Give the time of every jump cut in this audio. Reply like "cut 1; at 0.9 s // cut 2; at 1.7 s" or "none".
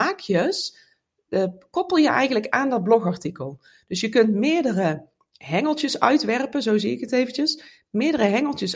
none